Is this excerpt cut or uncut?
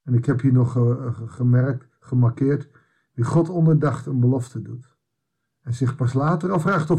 uncut